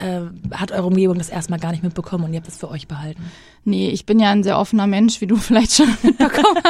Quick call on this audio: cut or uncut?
uncut